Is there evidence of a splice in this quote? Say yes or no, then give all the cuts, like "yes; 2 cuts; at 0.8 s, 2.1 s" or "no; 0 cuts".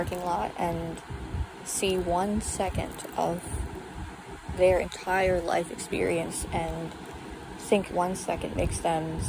yes; 1 cut; at 7.9 s